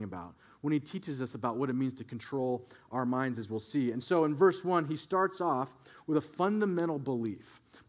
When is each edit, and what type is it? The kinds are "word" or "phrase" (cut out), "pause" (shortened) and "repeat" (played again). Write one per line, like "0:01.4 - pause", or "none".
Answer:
none